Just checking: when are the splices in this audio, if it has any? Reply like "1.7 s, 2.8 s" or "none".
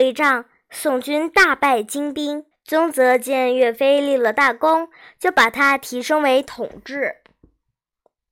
2.5 s